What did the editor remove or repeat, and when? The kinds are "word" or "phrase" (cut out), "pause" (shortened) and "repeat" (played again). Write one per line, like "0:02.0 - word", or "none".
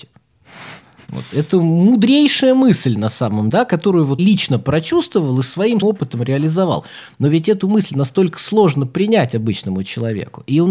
0:03.5 - word
0:04.2 - word
0:05.8 - word

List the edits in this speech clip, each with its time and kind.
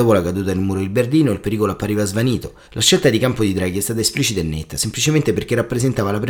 0:02.6 - pause

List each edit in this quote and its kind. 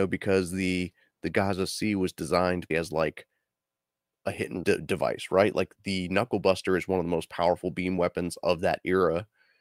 0:02.7 - word
0:04.6 - word
0:05.8 - word

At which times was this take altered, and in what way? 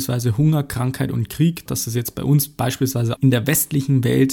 0:01.7 - word
0:03.2 - word

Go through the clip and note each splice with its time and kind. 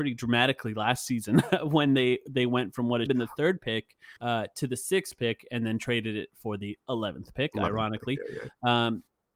0:03.1 - phrase
0:04.2 - pause

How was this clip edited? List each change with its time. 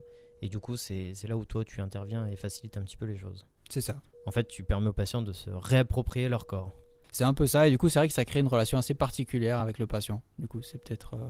none

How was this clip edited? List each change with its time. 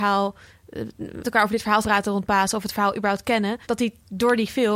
0:01.2 - word
0:01.8 - word
0:03.6 - pause

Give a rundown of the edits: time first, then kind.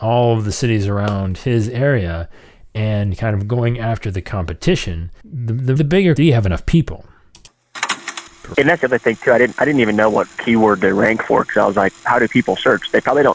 0:05.2 - pause
0:05.8 - word
0:06.2 - phrase
0:08.5 - word

